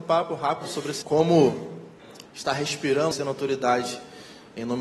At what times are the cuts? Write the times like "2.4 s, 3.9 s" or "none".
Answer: 1.0 s, 2.2 s, 3.1 s